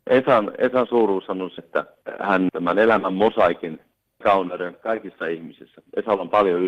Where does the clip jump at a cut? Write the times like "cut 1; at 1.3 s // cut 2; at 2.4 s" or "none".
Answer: cut 1; at 1.6 s // cut 2; at 2.5 s // cut 3; at 4.2 s // cut 4; at 4.7 s

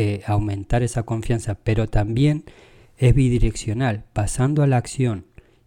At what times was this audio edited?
none

